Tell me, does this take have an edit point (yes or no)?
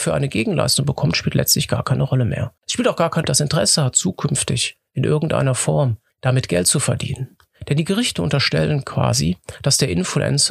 yes